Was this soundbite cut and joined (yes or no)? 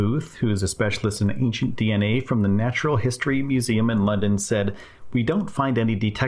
no